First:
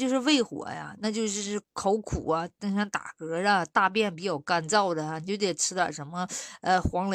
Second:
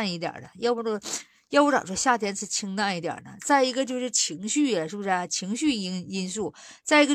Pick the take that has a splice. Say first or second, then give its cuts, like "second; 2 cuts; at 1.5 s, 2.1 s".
first; 1 cut; at 1.6 s